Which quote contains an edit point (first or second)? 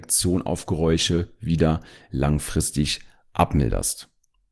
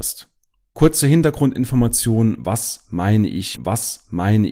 second